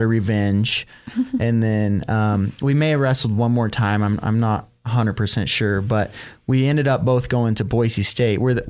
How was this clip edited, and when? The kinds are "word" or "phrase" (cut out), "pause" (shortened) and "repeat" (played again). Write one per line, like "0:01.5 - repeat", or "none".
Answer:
none